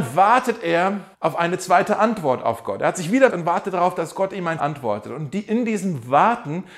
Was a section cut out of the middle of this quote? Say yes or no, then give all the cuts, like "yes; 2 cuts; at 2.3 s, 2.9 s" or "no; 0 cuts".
yes; 3 cuts; at 1.1 s, 3.3 s, 4.6 s